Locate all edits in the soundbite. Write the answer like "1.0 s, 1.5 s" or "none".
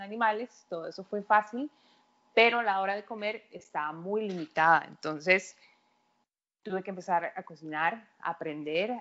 none